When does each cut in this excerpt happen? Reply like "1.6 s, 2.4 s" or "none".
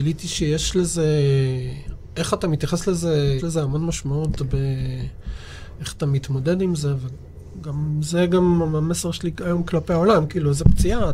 3.4 s